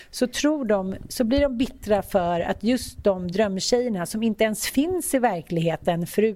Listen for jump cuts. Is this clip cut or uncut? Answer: uncut